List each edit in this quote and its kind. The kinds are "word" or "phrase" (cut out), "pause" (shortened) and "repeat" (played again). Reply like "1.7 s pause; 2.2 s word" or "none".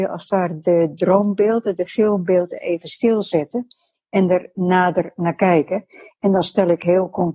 none